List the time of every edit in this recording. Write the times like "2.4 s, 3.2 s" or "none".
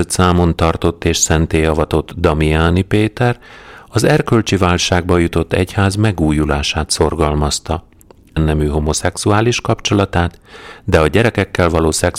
8.4 s